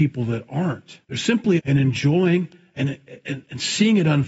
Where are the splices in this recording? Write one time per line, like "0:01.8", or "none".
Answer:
0:01.0
0:01.6